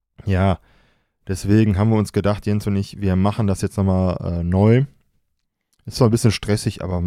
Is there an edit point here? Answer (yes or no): no